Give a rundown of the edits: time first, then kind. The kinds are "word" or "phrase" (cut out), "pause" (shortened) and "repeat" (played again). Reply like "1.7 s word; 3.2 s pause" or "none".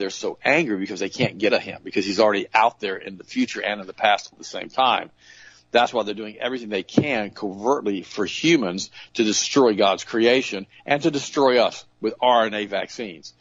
1.5 s word; 4.3 s word